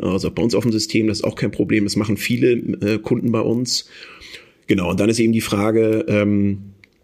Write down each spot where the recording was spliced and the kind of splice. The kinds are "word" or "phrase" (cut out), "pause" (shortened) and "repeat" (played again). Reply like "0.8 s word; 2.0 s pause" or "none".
none